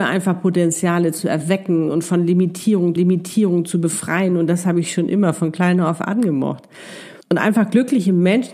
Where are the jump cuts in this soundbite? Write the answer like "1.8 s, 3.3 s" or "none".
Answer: 3.0 s, 7.2 s

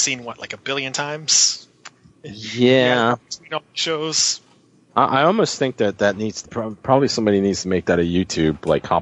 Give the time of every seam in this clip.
6.5 s

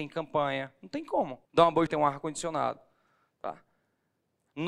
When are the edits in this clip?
1.4 s, 1.9 s

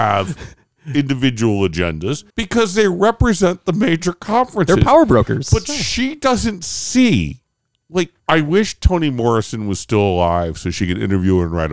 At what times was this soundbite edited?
2.3 s, 8.2 s

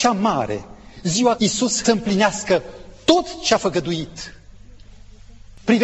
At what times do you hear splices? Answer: 1.4 s, 1.8 s

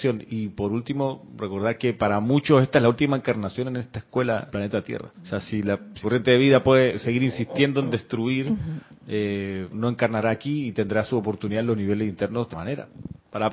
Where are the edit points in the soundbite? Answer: 4.5 s, 5.1 s, 6.0 s, 9.7 s, 12.5 s

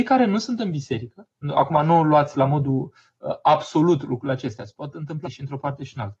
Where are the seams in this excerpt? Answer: 5.2 s

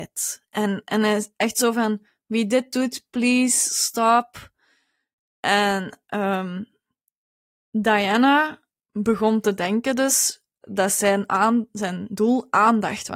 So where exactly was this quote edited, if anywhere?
none

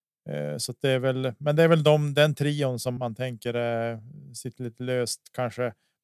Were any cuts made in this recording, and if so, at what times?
3.0 s

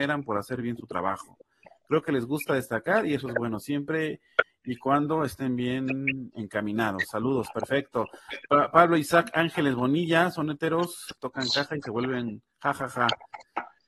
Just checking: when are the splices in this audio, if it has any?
none

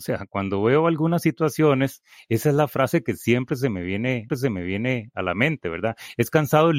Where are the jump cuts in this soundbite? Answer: 4.3 s

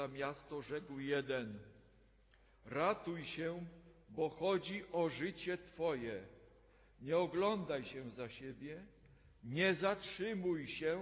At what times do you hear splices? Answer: none

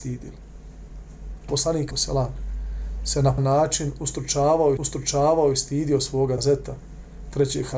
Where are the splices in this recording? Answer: 1.5 s, 1.9 s, 3.4 s, 4.8 s, 6.4 s

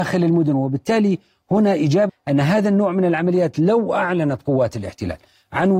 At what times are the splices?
2.1 s

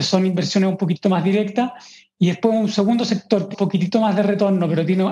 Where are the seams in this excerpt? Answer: 3.5 s

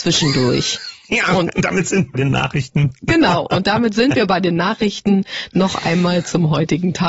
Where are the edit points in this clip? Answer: 2.1 s

